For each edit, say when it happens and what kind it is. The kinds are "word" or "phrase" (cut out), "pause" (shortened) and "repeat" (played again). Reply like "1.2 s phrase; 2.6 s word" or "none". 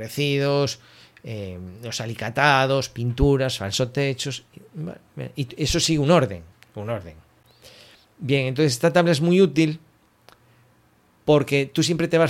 6.5 s pause

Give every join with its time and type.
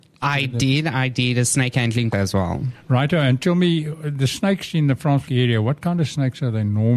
2.1 s word; 5.3 s word

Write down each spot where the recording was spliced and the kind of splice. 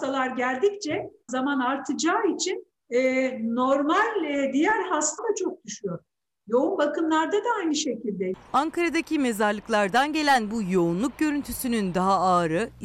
1.3 s phrase; 2.8 s pause; 5.2 s phrase

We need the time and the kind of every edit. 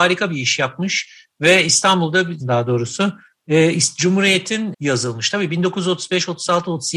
2.4 s phrase; 4.7 s phrase

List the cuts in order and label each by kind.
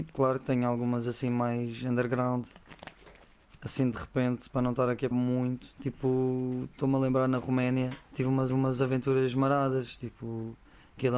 5.1 s word; 5.7 s pause; 8.0 s pause; 8.5 s repeat

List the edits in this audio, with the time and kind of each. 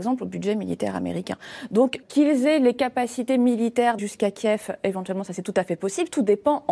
2.0 s word; 4.0 s word

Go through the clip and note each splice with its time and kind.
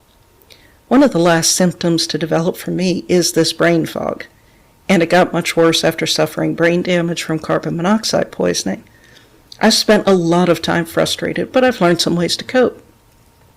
none

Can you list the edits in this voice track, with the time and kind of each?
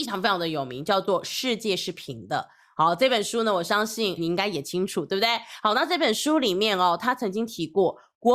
4.2 s word

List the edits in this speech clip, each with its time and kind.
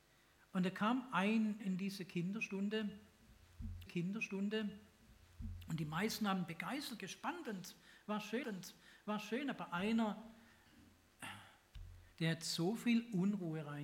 1.6 s word; 3.9 s repeat; 7.0 s phrase; 8.4 s repeat; 12.1 s pause

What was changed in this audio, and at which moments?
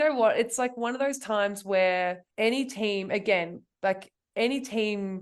2.3 s pause

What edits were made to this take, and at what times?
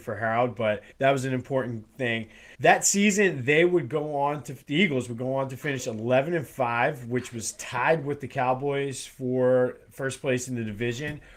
0.9 s pause; 2.5 s pause

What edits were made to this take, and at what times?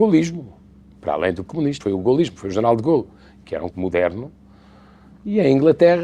1.5 s word; 1.8 s word; 3.7 s word

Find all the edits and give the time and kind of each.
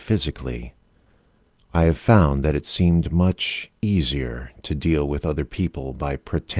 3.8 s pause

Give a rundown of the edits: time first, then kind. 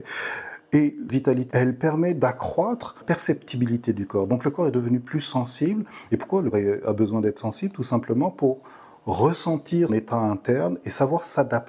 1.1 s word; 1.5 s word; 3.0 s word; 6.5 s word; 9.9 s word

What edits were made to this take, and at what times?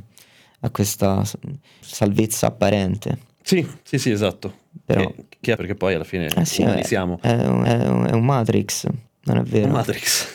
1.8 s word; 3.8 s pause; 5.6 s word; 7.6 s repeat; 9.1 s pause

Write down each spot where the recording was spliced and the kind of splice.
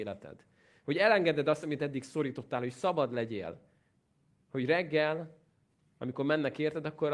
none

